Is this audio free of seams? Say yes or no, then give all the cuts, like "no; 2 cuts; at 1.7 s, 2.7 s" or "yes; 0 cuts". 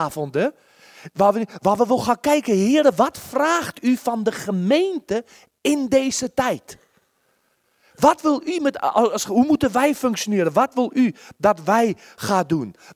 yes; 0 cuts